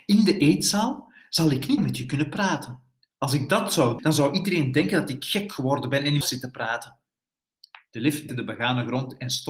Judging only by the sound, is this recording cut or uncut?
cut